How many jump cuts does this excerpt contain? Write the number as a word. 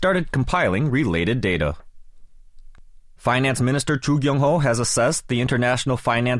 zero